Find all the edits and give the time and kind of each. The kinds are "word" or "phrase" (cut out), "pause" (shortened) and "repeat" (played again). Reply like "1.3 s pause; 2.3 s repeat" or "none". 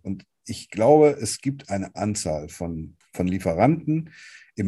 1.9 s word; 3.0 s word